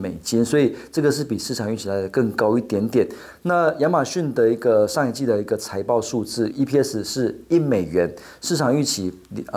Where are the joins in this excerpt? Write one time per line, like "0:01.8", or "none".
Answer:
0:06.5

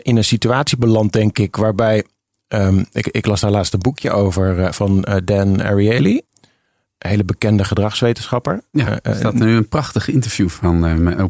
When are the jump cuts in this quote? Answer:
none

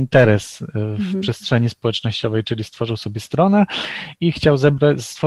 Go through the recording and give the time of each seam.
none

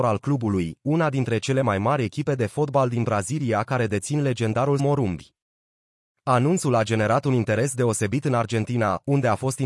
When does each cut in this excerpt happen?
0:04.8

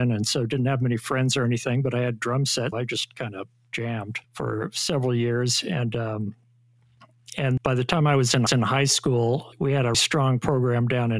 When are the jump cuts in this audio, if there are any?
0:02.7
0:04.2
0:07.6
0:08.5
0:09.5
0:09.9

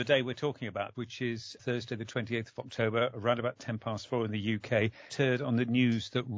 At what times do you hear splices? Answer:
0:00.9
0:01.6
0:05.1

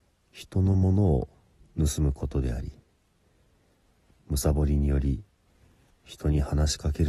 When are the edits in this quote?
none

